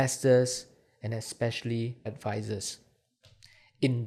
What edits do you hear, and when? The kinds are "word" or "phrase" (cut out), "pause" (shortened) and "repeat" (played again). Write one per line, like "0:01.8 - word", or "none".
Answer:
0:02.1 - word